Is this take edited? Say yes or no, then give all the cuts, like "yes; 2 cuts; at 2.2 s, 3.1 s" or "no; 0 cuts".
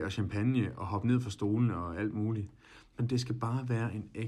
no; 0 cuts